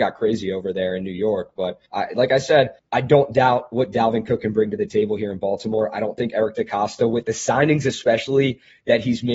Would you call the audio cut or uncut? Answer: cut